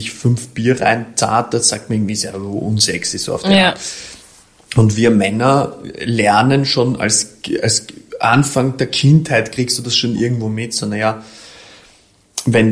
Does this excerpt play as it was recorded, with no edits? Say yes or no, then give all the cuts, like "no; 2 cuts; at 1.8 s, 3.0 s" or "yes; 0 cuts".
yes; 0 cuts